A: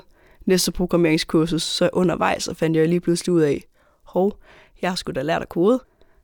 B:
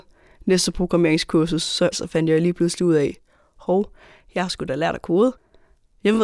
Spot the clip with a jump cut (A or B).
B